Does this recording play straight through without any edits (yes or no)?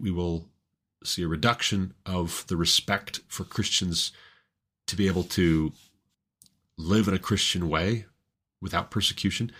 yes